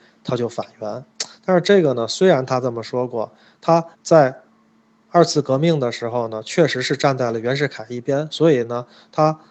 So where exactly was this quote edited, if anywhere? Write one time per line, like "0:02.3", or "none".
0:03.9